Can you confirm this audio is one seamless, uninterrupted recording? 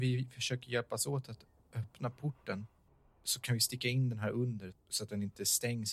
no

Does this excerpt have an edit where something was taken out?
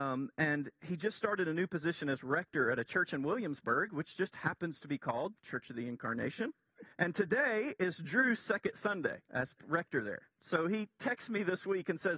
yes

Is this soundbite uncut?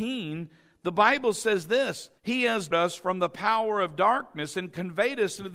no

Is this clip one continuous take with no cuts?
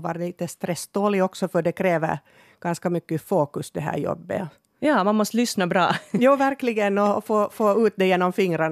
yes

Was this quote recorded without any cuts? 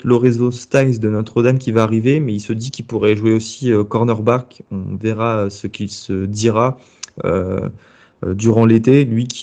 yes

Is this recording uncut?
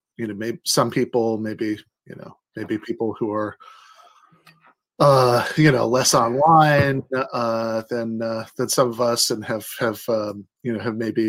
yes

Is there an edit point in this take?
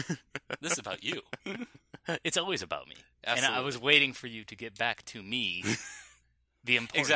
no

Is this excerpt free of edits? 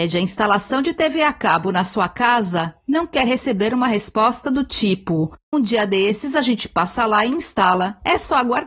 no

